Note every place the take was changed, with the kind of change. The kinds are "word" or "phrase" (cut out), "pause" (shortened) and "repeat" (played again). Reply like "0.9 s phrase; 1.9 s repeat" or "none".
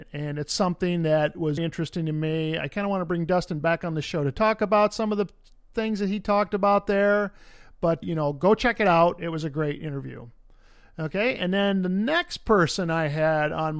1.6 s word; 8.0 s word